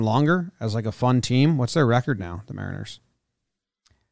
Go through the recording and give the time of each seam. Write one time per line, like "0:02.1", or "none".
none